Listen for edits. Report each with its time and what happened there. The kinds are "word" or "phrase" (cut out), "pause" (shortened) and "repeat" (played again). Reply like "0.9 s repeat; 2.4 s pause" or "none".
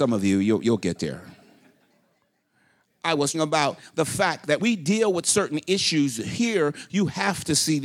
3.3 s word; 4.6 s word